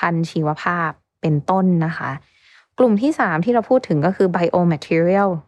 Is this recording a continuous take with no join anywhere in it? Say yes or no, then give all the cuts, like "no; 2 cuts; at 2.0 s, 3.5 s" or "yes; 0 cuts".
yes; 0 cuts